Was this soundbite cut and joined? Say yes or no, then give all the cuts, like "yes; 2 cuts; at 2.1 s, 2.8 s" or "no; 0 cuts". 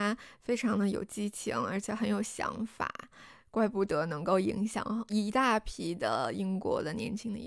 no; 0 cuts